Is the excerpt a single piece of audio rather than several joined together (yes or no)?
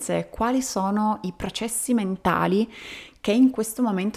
yes